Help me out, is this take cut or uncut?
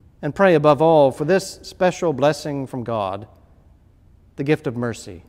uncut